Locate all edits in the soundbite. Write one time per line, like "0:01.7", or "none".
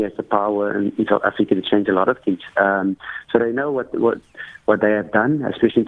none